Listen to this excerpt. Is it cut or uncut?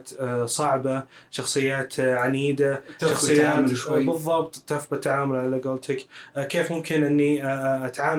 uncut